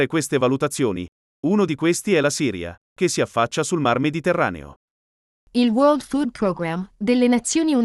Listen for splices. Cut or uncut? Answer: uncut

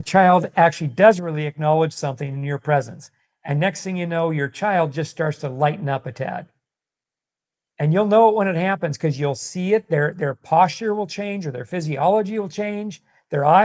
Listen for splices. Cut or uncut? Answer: uncut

